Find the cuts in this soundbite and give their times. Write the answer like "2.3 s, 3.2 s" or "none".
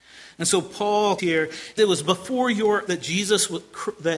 1.2 s, 1.8 s, 2.9 s